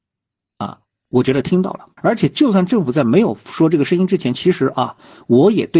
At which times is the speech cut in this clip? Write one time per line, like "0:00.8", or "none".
0:02.0

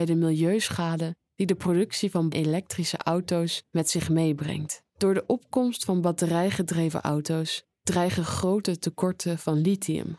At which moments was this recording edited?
0:02.3
0:04.9

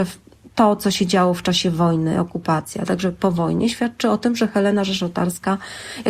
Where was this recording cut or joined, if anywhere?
none

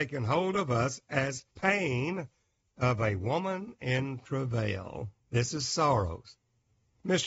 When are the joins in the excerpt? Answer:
0:01.5
0:05.2

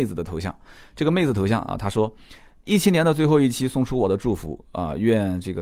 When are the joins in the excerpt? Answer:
none

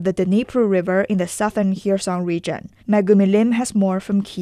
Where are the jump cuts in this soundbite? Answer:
0:02.8

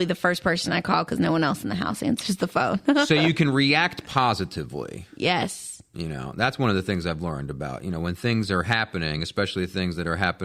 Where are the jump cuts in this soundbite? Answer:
none

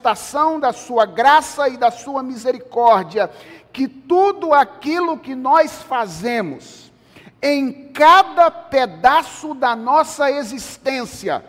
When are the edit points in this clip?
none

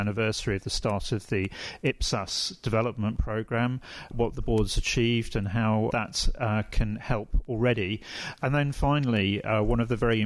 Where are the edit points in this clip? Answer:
none

